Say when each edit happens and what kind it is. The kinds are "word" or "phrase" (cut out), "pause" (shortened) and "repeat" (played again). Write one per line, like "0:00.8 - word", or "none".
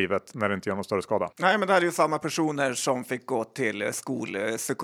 0:01.3 - pause